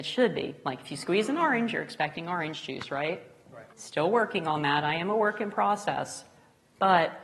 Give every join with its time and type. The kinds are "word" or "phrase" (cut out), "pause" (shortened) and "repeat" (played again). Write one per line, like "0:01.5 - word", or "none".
0:03.7 - pause